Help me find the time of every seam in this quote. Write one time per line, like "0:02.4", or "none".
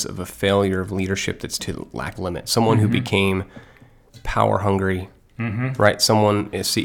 0:01.6
0:02.1